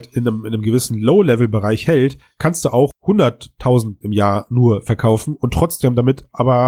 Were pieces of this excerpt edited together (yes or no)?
yes